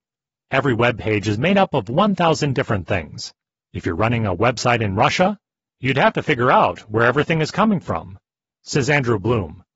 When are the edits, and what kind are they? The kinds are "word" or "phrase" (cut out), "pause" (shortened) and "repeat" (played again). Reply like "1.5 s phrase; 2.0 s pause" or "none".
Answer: none